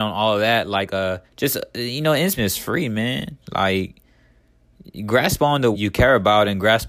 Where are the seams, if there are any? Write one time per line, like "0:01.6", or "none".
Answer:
0:01.3
0:02.4
0:03.4
0:05.7